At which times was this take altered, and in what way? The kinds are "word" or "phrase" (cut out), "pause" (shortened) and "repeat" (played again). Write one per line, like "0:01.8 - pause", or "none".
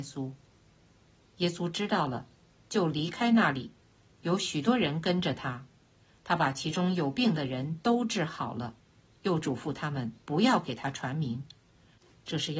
0:10.2 - pause